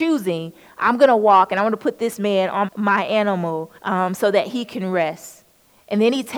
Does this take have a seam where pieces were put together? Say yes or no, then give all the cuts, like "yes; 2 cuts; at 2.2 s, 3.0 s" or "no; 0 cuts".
yes; 2 cuts; at 2.7 s, 3.8 s